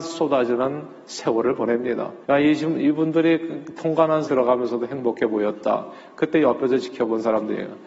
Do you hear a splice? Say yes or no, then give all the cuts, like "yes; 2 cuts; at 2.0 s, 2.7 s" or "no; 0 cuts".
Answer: yes; 2 cuts; at 2.2 s, 4.3 s